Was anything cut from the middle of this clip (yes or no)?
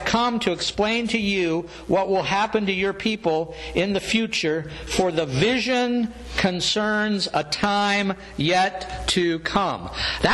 no